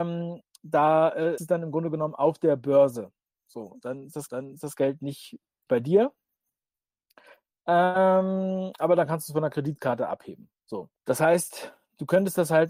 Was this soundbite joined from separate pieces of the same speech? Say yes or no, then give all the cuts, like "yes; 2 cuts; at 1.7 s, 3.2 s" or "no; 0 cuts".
yes; 4 cuts; at 1.4 s, 4.3 s, 5.7 s, 11.0 s